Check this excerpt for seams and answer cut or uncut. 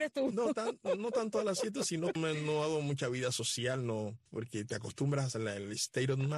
cut